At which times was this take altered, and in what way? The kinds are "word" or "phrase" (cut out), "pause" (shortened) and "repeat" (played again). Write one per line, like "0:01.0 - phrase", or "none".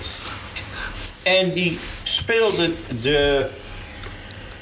none